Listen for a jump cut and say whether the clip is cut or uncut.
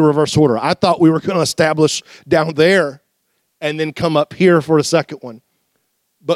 uncut